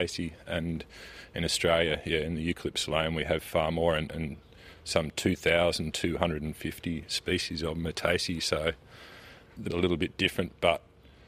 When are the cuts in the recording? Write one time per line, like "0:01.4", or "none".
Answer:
0:09.7

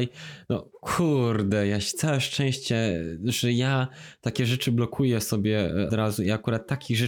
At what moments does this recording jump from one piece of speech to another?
0:05.9

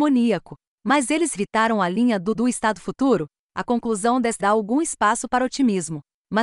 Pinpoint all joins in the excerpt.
0:01.3
0:02.3
0:04.4

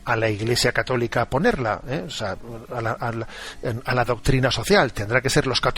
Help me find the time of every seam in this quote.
none

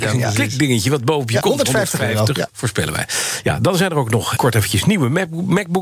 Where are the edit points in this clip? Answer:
0:01.4
0:02.5
0:04.4

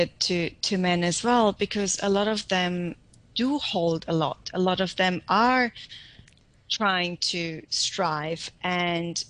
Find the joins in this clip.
none

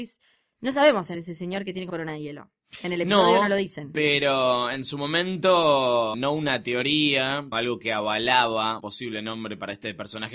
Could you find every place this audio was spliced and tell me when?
0:01.1
0:01.9
0:06.1
0:07.5
0:08.8

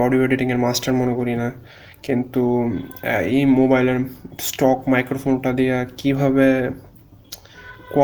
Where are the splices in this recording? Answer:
none

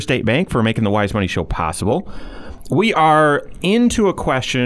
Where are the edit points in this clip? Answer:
none

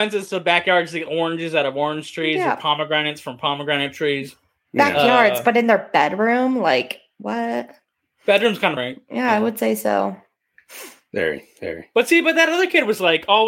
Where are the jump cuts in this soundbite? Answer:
0:01.1
0:08.8

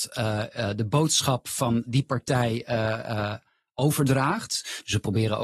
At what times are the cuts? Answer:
0:01.9

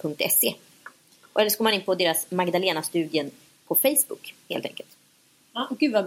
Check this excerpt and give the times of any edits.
none

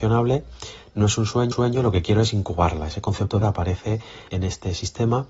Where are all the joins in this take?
0:01.5
0:03.4
0:04.3

